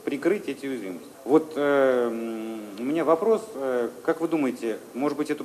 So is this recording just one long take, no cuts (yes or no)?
no